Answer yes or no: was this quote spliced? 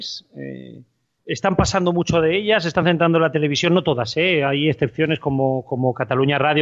no